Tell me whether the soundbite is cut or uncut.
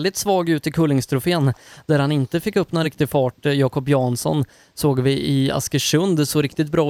uncut